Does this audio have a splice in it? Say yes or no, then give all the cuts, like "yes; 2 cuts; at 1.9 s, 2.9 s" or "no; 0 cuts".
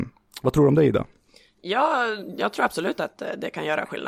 no; 0 cuts